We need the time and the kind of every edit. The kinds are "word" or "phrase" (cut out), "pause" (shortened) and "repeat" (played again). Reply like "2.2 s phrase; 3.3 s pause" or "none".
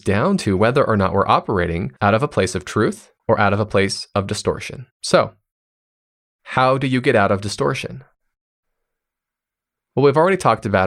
2.0 s pause; 3.2 s pause; 4.9 s pause